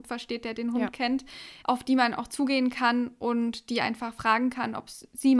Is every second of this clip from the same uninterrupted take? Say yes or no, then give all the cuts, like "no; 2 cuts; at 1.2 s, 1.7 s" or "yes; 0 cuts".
no; 1 cut; at 1.6 s